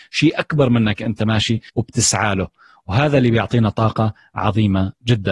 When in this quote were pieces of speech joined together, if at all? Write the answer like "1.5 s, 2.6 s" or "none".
1.7 s